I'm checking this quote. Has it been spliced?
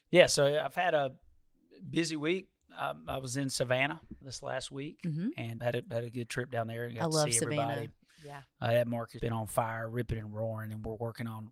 yes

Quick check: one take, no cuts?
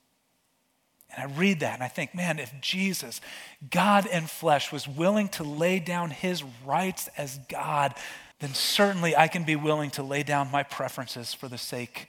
no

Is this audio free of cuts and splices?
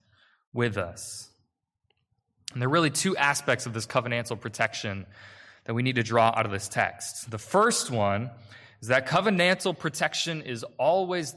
yes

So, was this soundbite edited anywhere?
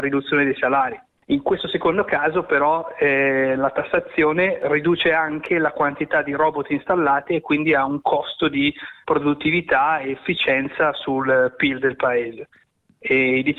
no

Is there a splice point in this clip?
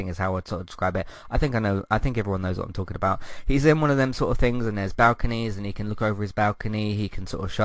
no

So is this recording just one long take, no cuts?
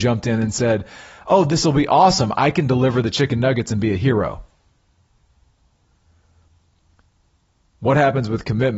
yes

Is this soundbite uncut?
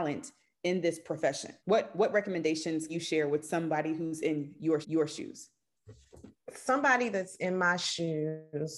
no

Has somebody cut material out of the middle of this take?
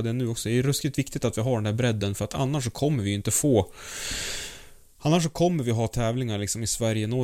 no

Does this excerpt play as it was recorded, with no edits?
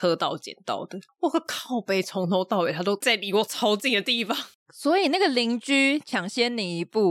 yes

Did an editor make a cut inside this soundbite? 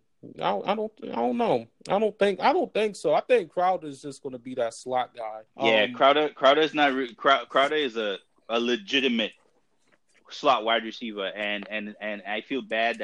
yes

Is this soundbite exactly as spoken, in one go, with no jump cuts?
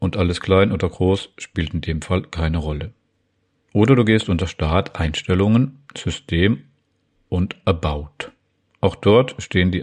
yes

